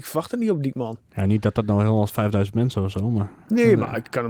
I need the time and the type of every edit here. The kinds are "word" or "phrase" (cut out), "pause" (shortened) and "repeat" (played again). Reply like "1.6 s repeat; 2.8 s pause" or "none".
2.1 s phrase